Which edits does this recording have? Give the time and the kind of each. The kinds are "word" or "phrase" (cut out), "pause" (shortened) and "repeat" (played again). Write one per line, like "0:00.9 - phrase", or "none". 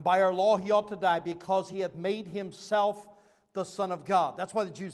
none